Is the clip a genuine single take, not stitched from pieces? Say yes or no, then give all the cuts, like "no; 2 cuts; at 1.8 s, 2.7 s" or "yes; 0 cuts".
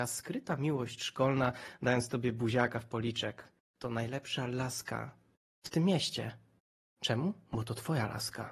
yes; 0 cuts